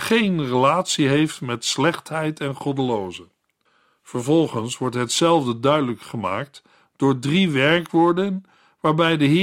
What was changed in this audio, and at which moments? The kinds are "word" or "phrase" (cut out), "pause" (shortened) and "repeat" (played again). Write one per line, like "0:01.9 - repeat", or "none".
none